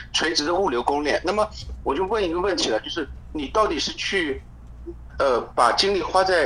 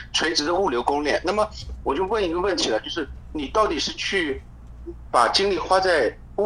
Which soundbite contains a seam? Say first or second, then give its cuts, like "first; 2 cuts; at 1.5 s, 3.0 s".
second; 1 cut; at 5.1 s